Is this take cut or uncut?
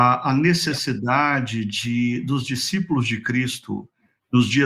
uncut